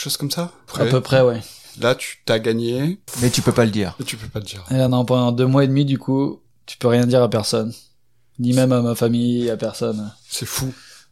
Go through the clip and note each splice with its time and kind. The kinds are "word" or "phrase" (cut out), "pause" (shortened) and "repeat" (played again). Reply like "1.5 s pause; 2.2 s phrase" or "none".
none